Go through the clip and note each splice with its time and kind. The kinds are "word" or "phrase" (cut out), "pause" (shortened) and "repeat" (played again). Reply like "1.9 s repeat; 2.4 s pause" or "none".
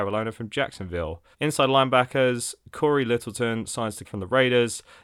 1.3 s pause; 4.0 s word